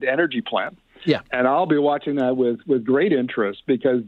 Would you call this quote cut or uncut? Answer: uncut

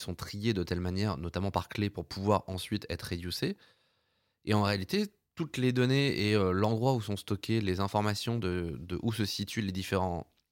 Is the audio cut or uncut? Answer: uncut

